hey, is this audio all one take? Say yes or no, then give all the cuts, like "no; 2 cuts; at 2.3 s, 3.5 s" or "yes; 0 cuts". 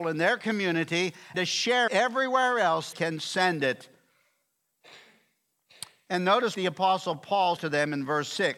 no; 5 cuts; at 1.3 s, 1.9 s, 2.9 s, 6.5 s, 7.6 s